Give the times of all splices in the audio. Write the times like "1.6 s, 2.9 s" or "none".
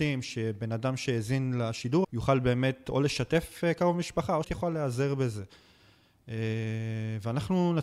2.0 s, 4.4 s